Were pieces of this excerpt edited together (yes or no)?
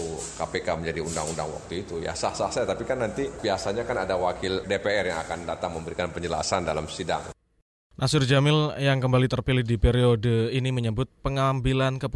no